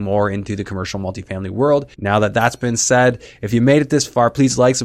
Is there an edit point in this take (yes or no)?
yes